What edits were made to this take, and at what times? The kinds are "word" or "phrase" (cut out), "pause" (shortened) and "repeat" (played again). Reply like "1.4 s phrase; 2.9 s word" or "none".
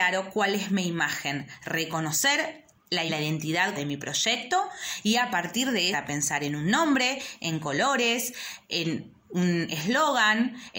3.1 s word; 3.8 s word; 5.9 s phrase